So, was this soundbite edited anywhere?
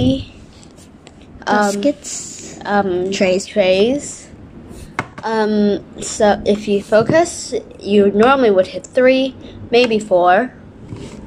no; 0 cuts

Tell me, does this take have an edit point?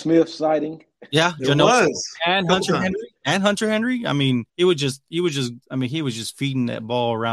yes; 2 cuts; at 4.5 s, 5.6 s

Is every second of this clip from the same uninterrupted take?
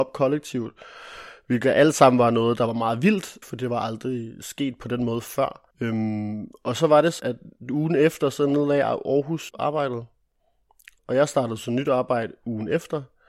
no; 4 cuts; at 3.4 s, 5.7 s, 7.2 s, 9.5 s

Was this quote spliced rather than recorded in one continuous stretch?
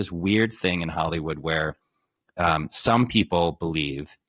no; 0 cuts

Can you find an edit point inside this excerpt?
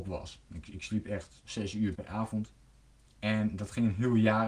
yes; 2 cuts; at 1.4 s, 1.9 s

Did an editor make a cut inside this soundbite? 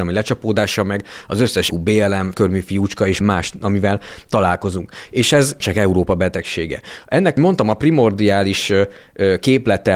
yes; 5 cuts; at 1.7 s, 2.3 s, 3.2 s, 5.6 s, 7.4 s

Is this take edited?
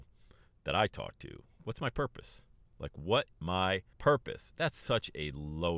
yes; 2 cuts; at 3.3 s, 3.9 s

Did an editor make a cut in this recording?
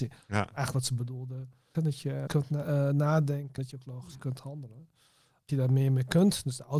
yes; 4 cuts; at 1.7 s, 2.3 s, 3.6 s, 5.5 s

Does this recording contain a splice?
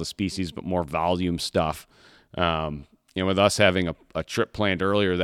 no; 0 cuts

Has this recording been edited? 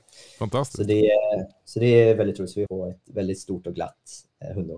yes; 1 cut; at 2.7 s

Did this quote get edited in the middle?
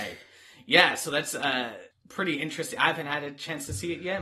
no; 0 cuts

